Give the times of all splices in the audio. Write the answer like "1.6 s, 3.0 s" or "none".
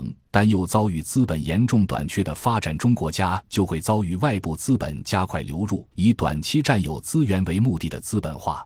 5.9 s